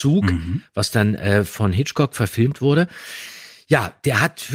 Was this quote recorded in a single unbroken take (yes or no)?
yes